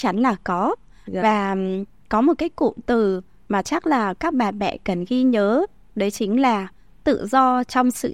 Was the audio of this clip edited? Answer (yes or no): no